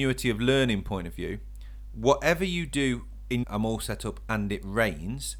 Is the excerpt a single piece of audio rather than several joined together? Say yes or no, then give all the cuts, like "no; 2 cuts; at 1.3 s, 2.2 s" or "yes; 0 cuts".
no; 1 cut; at 3.4 s